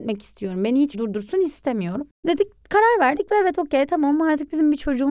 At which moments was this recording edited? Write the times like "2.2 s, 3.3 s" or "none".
0.9 s, 2.2 s